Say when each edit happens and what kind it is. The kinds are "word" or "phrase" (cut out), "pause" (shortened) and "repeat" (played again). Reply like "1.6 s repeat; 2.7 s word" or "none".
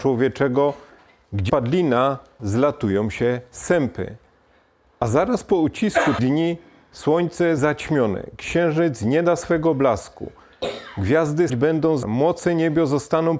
1.5 s word; 2.4 s word; 6.2 s word; 7.6 s word; 11.5 s word; 12.0 s word